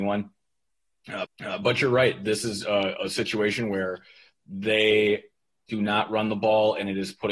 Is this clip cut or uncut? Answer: cut